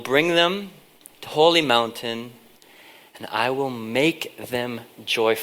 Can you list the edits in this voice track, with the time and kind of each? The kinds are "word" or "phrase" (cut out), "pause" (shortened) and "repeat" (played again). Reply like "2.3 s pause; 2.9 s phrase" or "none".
1.3 s word